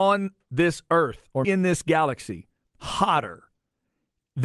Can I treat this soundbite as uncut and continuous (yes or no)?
no